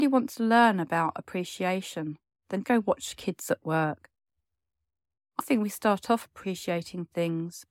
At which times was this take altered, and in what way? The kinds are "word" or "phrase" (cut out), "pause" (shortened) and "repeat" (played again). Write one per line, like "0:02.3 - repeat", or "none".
0:02.6 - word
0:05.4 - word